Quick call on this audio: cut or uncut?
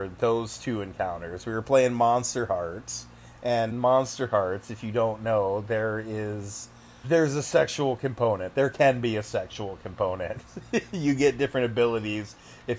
cut